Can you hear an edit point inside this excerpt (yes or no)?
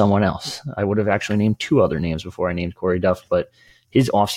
no